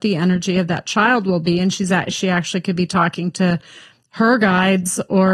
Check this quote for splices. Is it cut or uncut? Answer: uncut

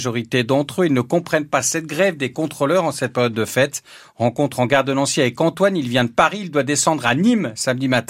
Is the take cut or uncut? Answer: uncut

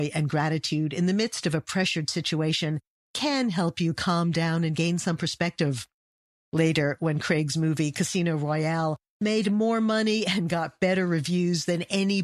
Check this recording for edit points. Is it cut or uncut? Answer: uncut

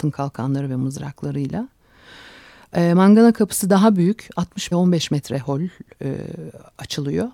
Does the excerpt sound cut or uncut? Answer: cut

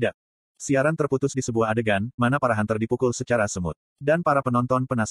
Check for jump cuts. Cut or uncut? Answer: cut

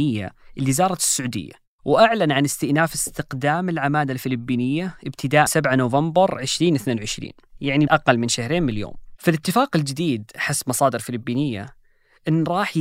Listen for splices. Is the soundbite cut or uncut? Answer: cut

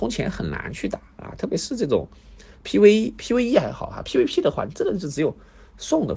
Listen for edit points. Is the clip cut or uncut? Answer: uncut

